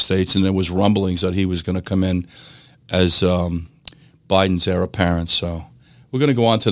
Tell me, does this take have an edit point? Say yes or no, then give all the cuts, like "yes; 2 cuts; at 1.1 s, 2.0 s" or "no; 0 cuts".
no; 0 cuts